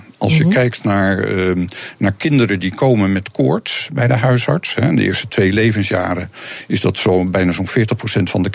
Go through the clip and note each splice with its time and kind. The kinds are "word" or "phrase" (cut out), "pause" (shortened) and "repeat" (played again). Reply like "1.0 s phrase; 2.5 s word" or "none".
none